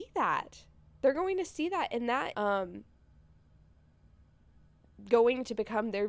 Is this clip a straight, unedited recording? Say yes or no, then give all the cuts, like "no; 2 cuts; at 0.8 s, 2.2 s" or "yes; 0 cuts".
no; 1 cut; at 2.3 s